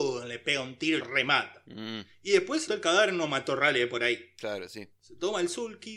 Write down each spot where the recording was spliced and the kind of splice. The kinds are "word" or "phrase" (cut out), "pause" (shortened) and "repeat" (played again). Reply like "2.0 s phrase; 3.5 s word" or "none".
1.0 s word; 2.7 s word

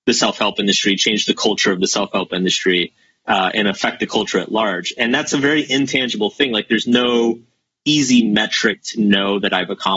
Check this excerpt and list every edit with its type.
none

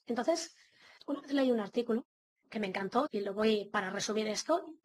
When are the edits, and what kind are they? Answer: 1.0 s word; 2.4 s word; 3.1 s word

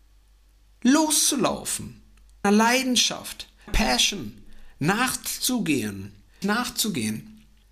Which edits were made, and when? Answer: 2.4 s word; 3.7 s word; 6.4 s word

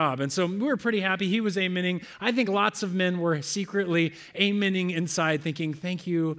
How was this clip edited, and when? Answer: none

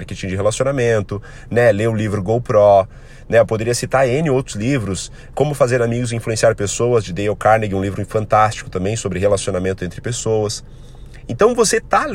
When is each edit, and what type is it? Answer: 5.3 s word

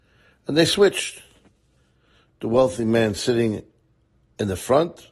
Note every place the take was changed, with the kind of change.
none

